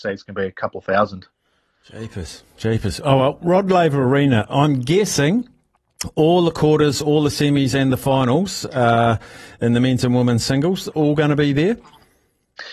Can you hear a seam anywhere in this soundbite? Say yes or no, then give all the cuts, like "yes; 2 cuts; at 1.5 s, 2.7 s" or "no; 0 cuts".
no; 0 cuts